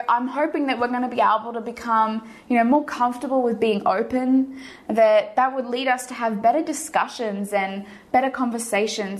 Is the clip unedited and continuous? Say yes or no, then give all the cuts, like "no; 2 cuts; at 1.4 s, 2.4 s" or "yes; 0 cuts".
yes; 0 cuts